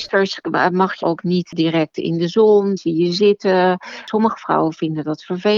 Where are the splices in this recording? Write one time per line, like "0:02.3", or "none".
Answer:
0:01.0
0:02.8